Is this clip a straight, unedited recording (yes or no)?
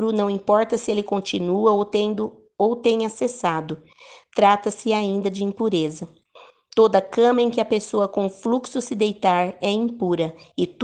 yes